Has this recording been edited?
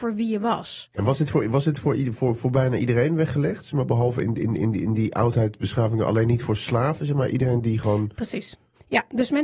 no; 0 cuts

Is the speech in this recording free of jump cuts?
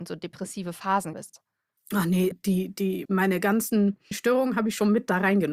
no; 4 cuts; at 1.1 s, 2.3 s, 3.1 s, 4.1 s

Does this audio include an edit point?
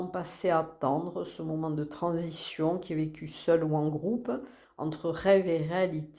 no; 0 cuts

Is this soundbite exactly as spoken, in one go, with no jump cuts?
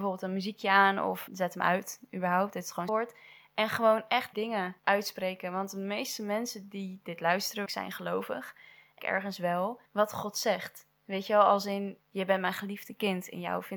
no; 8 cuts; at 1.3 s, 2.9 s, 4.3 s, 4.8 s, 7.7 s, 9.0 s, 9.9 s, 12.0 s

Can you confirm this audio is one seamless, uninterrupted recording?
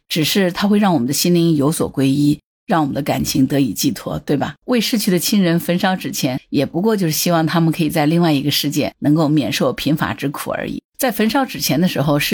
no; 2 cuts; at 4.6 s, 10.9 s

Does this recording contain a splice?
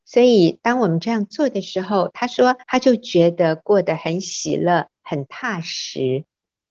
yes; 2 cuts; at 2.6 s, 4.9 s

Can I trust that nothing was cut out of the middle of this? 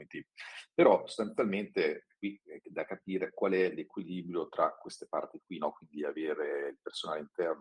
yes; 0 cuts

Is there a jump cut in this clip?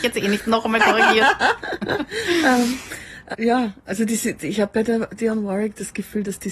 yes; 2 cuts; at 3.3 s, 4.4 s

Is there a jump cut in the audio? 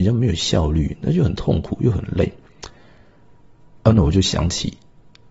no; 0 cuts

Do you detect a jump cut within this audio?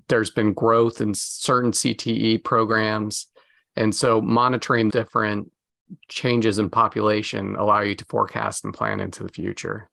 yes; 1 cut; at 4.9 s

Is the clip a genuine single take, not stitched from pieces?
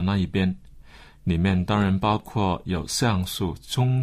yes; 0 cuts

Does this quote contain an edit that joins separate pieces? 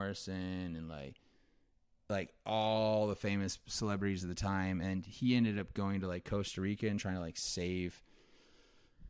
no; 0 cuts

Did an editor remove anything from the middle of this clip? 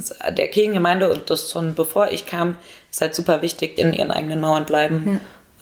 yes; 1 cut; at 3.8 s

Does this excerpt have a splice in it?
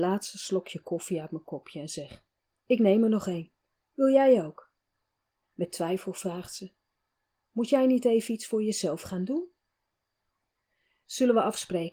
no; 0 cuts

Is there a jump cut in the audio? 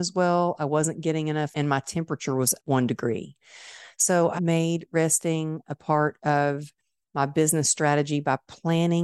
yes; 3 cuts; at 1.5 s, 2.6 s, 4.4 s

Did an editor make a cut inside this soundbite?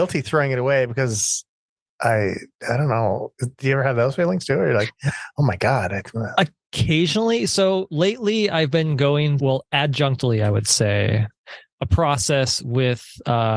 yes; 1 cut; at 9.4 s

